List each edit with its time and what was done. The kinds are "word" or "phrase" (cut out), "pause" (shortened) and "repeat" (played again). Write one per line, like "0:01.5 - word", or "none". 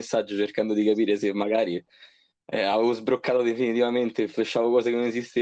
none